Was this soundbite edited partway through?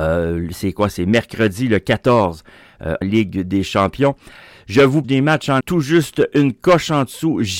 yes; 3 cuts; at 3.0 s, 5.0 s, 5.6 s

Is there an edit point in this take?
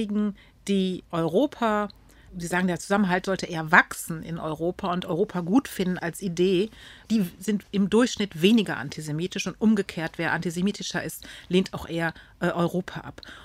yes; 1 cut; at 6.0 s

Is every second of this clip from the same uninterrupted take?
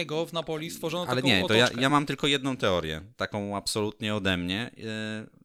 yes; 0 cuts

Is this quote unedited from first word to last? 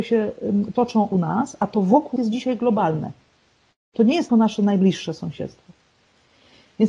no; 3 cuts; at 1.1 s, 2.2 s, 4.3 s

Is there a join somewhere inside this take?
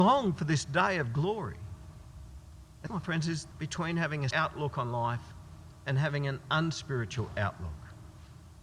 yes; 3 cuts; at 2.9 s, 3.5 s, 4.3 s

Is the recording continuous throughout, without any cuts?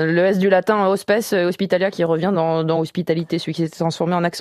yes; 0 cuts

